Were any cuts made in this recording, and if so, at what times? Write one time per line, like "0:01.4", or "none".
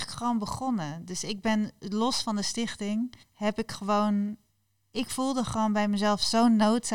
0:03.2